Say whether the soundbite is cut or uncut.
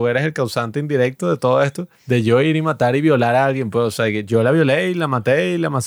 cut